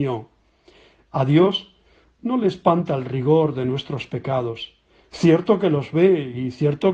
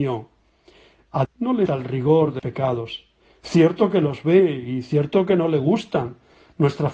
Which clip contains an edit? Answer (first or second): second